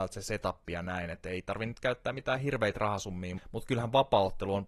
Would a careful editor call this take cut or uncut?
cut